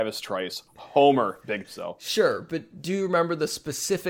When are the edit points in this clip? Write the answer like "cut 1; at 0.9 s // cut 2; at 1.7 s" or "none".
cut 1; at 1.6 s